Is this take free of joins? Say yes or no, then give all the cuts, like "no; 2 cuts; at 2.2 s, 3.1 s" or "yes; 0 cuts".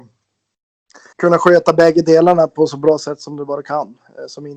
no; 1 cut; at 1.1 s